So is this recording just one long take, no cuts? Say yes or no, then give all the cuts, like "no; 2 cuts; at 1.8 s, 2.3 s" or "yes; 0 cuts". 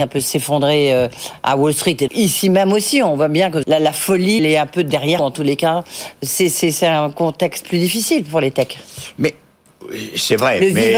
no; 4 cuts; at 2.1 s, 3.6 s, 4.4 s, 5.2 s